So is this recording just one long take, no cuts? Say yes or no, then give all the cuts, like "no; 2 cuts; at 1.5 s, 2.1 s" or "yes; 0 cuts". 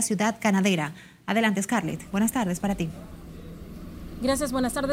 yes; 0 cuts